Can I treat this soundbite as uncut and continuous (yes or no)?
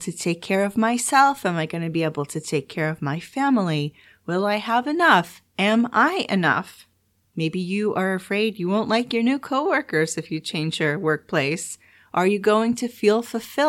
yes